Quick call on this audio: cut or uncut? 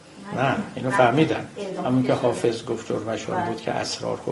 uncut